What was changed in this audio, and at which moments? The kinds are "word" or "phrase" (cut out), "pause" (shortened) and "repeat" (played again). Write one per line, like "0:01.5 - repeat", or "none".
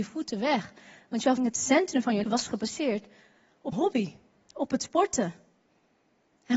0:01.4 - word
0:02.2 - word
0:03.7 - word